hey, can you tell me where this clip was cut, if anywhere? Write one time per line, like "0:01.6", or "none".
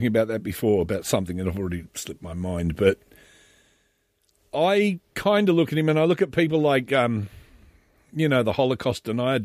none